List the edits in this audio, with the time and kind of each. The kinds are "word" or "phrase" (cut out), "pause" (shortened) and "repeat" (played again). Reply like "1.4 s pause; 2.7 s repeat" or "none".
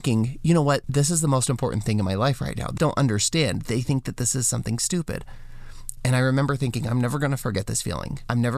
2.8 s word